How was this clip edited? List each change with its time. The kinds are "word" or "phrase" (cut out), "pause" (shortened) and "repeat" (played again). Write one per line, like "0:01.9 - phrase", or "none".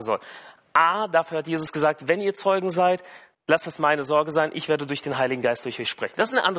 0:03.3 - pause